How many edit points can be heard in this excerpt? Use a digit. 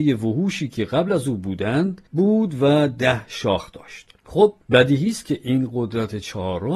2